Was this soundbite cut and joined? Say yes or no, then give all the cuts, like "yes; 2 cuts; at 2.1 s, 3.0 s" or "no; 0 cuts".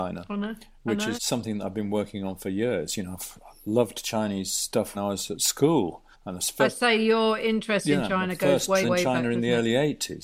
yes; 4 cuts; at 1.1 s, 4.9 s, 6.1 s, 8.8 s